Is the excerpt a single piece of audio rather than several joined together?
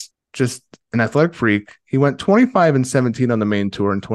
yes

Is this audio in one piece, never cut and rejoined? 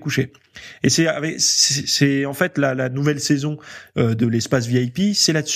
yes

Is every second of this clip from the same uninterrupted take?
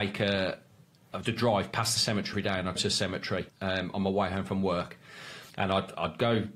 no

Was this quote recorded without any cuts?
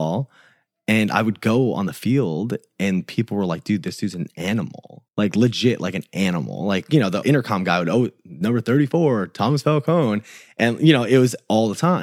no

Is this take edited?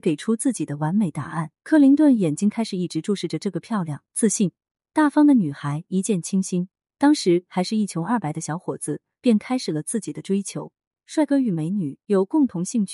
yes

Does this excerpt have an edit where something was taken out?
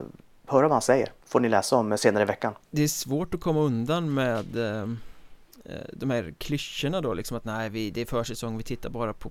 yes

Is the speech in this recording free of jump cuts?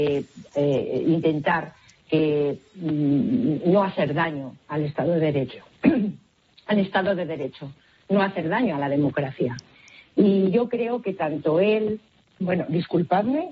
no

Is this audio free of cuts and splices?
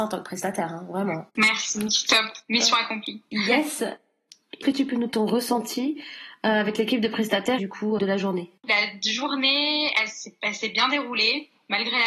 no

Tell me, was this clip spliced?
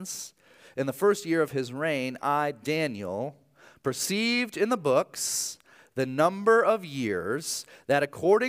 no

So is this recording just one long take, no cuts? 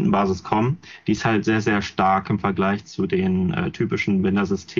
yes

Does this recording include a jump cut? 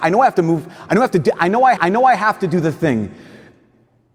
yes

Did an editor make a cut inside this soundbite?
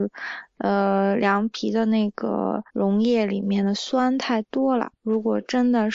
yes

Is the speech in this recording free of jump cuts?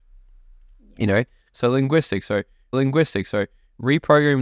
no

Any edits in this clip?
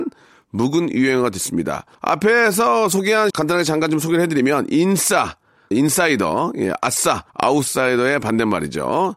yes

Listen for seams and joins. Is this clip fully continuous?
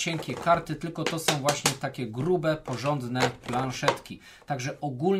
yes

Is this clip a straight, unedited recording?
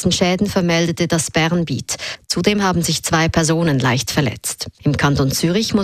no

